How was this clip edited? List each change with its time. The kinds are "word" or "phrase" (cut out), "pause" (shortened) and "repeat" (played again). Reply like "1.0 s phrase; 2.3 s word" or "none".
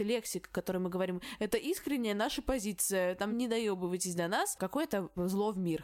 none